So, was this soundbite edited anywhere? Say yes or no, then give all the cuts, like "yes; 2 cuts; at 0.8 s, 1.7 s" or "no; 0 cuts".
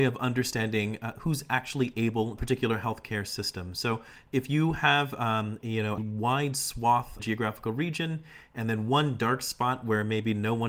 yes; 3 cuts; at 2.4 s, 6.0 s, 7.2 s